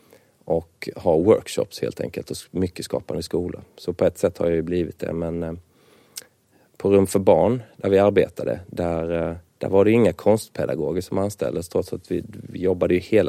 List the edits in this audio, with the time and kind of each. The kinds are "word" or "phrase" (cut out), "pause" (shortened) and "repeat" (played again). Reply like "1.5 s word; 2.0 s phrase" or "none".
9.5 s pause